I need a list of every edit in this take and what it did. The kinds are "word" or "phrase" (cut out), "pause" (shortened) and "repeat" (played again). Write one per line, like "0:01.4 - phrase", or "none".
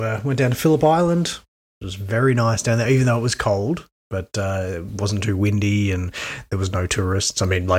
none